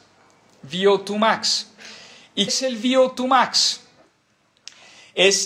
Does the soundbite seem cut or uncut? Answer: cut